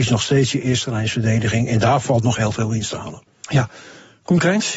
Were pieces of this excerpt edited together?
yes; 1 cut; at 3.3 s

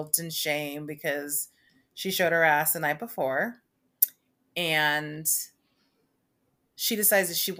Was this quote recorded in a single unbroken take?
yes; 0 cuts

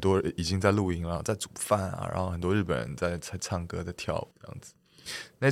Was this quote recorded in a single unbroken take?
no; 1 cut; at 4.3 s

